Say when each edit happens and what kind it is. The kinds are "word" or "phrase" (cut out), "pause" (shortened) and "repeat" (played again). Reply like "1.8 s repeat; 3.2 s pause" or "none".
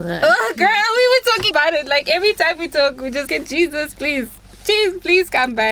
1.5 s word; 3.3 s word